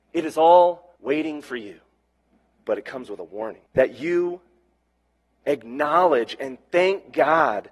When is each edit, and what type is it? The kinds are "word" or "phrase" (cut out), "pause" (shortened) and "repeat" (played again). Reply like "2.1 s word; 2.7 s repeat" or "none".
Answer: 1.0 s pause; 2.1 s pause; 3.7 s pause